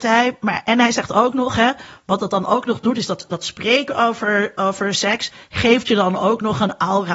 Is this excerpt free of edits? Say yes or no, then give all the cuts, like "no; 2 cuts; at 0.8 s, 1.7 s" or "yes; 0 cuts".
yes; 0 cuts